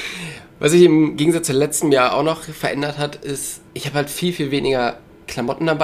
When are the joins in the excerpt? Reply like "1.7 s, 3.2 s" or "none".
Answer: 3.7 s